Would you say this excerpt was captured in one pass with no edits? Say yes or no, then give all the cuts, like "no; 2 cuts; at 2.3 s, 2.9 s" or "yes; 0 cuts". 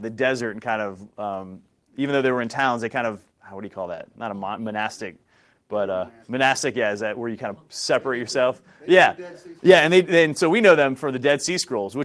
no; 4 cuts; at 3.3 s, 6.2 s, 7.7 s, 9.6 s